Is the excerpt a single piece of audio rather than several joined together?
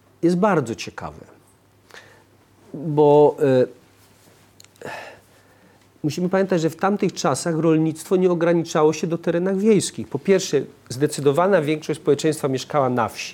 yes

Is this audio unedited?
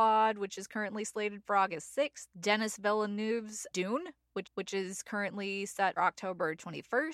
no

